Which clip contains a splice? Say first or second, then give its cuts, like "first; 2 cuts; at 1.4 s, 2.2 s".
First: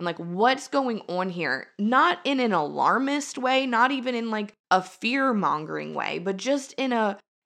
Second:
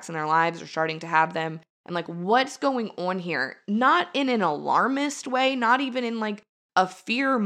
first; 1 cut; at 4.6 s